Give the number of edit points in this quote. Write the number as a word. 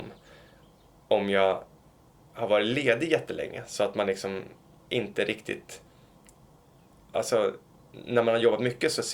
zero